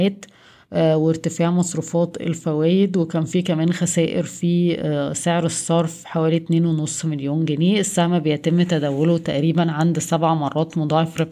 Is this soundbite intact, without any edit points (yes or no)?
yes